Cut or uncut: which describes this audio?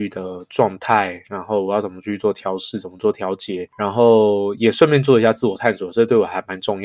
uncut